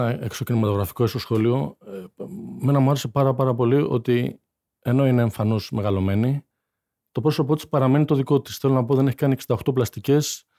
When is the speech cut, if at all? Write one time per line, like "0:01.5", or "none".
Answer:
none